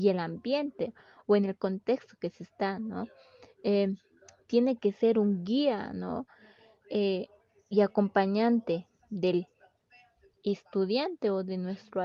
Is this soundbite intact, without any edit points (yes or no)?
yes